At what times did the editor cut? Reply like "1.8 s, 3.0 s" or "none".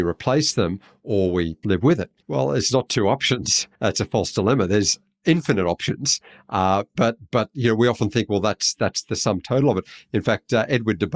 1.6 s, 2.2 s, 2.9 s, 3.7 s, 6.9 s